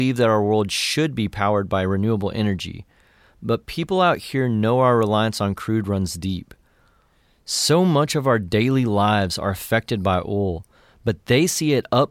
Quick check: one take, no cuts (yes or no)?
yes